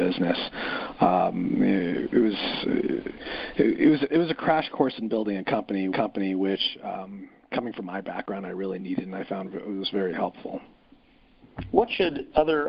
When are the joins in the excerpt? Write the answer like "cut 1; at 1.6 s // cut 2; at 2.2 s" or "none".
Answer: cut 1; at 5.9 s